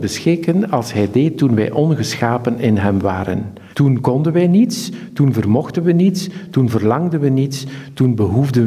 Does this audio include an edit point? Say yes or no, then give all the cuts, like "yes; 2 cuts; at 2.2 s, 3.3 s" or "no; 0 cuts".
yes; 1 cut; at 3.7 s